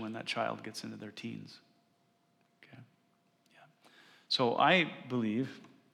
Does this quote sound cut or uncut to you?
uncut